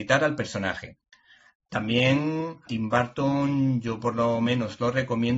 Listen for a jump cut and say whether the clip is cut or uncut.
cut